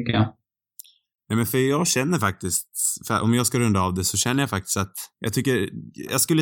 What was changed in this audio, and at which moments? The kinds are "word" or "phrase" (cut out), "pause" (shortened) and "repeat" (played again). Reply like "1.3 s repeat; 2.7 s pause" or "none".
5.1 s pause